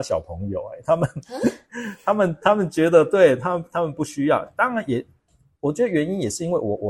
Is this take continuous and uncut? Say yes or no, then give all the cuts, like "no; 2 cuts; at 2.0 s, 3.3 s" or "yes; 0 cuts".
yes; 0 cuts